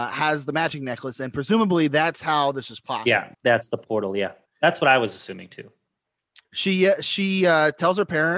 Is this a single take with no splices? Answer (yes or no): no